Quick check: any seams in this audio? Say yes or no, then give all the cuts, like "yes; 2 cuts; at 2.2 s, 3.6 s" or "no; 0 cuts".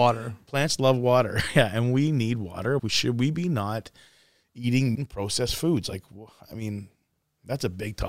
yes; 2 cuts; at 2.8 s, 5.0 s